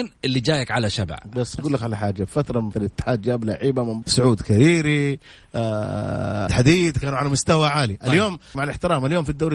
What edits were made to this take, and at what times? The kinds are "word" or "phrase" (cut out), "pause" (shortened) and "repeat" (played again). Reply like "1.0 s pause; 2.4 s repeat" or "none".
1.6 s word; 2.7 s word; 4.0 s word; 6.5 s word; 8.5 s word